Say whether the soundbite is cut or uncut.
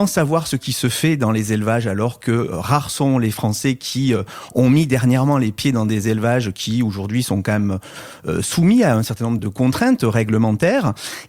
cut